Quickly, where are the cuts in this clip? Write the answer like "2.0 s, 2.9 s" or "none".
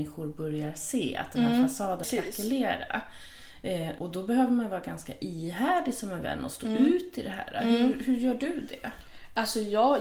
2.0 s, 4.0 s